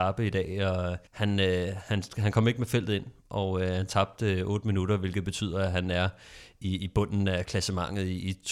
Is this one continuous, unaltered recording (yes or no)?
no